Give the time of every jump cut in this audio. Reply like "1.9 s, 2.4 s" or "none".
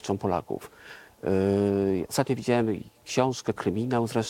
none

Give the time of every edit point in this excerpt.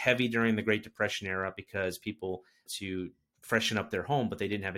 2.7 s

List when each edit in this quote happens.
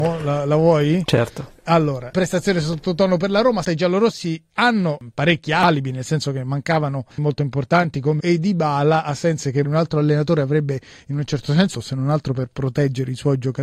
2.1 s, 3.6 s, 7.2 s, 8.2 s, 9.6 s, 11.7 s

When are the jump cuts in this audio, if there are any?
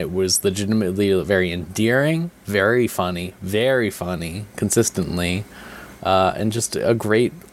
none

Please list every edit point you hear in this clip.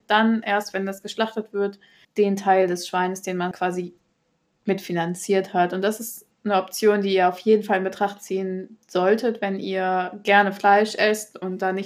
2.0 s, 3.5 s, 8.8 s

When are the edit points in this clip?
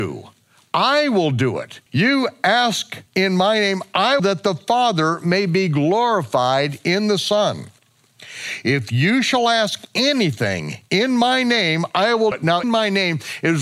1.9 s, 3.1 s, 4.2 s, 12.3 s, 12.6 s

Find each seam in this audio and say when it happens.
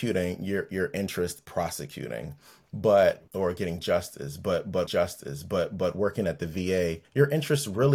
1.4 s, 3.3 s, 4.9 s, 7.0 s

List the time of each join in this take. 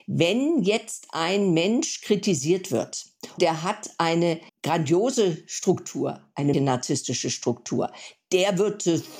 3.4 s, 4.5 s, 6.5 s

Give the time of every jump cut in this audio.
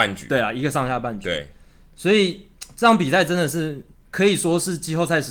3.9 s

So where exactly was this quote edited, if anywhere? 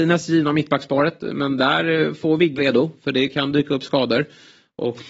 2.6 s

